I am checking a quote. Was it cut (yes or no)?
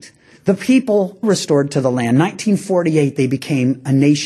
yes